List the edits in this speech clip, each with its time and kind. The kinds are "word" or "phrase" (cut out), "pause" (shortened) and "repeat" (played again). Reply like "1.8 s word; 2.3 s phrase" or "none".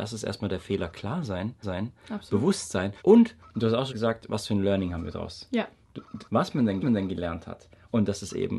1.6 s repeat; 3.0 s pause; 3.9 s word; 6.3 s phrase; 6.8 s repeat